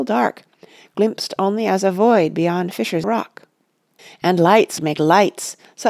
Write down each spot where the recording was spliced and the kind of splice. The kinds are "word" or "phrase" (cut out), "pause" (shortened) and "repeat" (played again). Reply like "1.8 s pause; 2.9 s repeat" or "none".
3.0 s phrase; 4.0 s pause; 4.8 s phrase